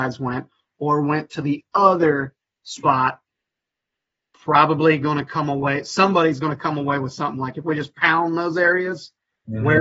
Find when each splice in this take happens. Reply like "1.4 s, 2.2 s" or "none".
none